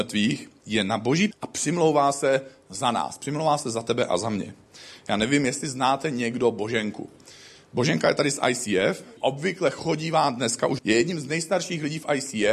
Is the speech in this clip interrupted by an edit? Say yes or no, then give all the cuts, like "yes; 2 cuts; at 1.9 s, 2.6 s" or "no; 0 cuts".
yes; 3 cuts; at 1.3 s, 9.2 s, 10.8 s